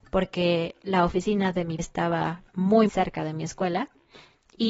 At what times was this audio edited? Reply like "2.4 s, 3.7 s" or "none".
1.8 s, 2.9 s

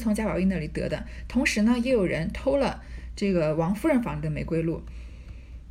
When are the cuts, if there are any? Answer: none

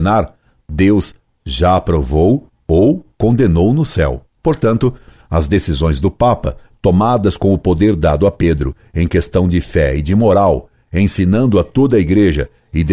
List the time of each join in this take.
none

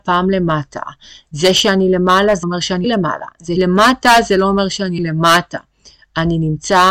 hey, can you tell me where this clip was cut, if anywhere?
2.4 s, 2.8 s, 3.6 s, 5.0 s

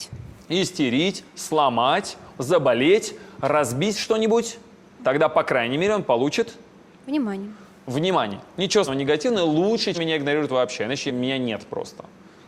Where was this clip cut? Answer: 2.4 s, 8.9 s, 9.9 s, 11.1 s

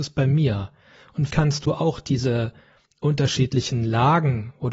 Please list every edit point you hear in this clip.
1.3 s

